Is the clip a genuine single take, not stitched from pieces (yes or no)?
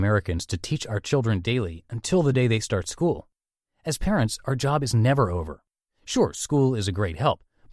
yes